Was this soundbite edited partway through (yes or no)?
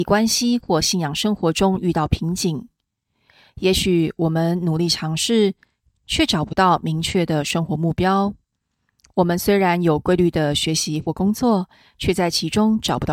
no